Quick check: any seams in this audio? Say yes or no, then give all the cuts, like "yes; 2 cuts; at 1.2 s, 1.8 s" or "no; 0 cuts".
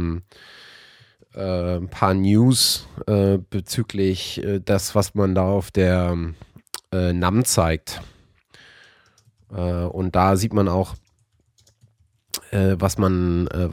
no; 0 cuts